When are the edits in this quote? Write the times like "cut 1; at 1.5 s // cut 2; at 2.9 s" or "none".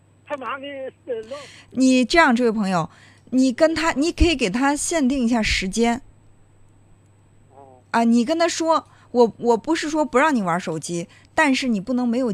none